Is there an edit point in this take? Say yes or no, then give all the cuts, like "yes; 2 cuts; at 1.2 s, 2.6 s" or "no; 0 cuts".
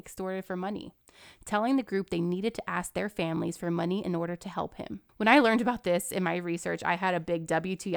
yes; 1 cut; at 5.1 s